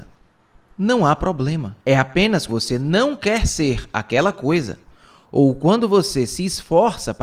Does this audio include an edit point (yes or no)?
yes